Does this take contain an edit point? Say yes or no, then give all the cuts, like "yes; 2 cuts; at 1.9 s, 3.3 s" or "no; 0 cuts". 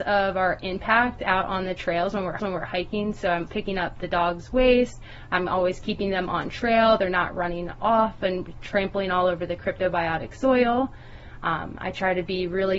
yes; 2 cuts; at 2.4 s, 3.5 s